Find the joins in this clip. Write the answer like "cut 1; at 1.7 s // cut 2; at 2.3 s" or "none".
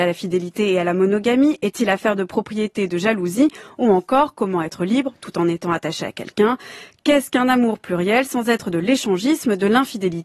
none